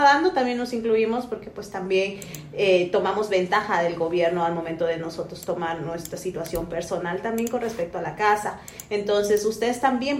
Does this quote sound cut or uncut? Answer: uncut